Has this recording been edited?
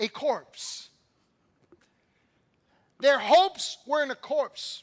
no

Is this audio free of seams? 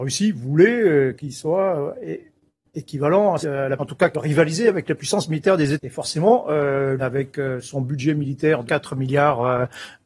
no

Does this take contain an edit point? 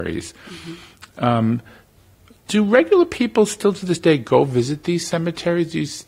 no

